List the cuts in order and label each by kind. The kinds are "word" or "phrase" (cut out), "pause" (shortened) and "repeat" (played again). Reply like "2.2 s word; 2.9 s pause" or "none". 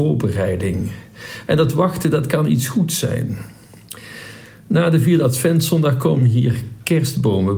none